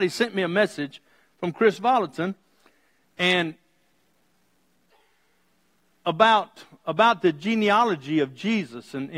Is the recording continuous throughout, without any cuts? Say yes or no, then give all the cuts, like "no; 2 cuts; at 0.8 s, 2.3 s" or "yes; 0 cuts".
yes; 0 cuts